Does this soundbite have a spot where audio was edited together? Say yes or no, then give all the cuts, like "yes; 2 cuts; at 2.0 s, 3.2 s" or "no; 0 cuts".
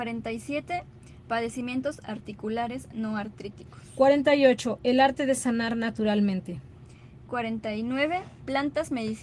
no; 0 cuts